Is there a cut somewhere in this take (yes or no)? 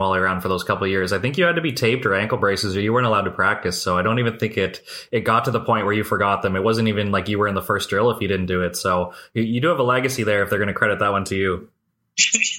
no